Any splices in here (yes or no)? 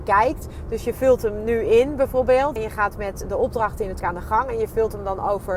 yes